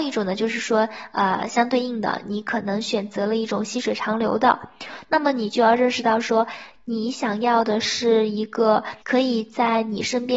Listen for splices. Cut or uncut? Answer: cut